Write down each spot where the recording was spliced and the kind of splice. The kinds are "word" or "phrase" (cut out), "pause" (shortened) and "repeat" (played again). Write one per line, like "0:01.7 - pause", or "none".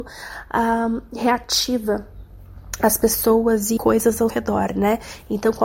0:03.8 - word
0:04.3 - word